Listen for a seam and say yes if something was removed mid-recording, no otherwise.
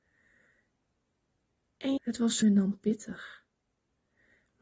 yes